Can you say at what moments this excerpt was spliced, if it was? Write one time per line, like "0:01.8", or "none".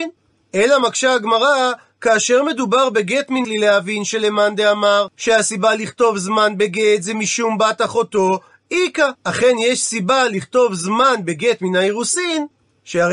0:03.4
0:05.1
0:09.2